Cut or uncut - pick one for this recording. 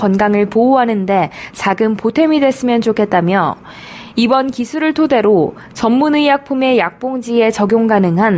uncut